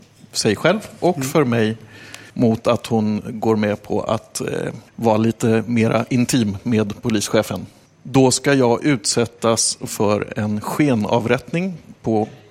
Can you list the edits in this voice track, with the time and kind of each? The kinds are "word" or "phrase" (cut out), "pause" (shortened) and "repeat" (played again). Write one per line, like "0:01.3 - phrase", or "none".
0:02.3 - pause
0:04.9 - pause
0:07.9 - pause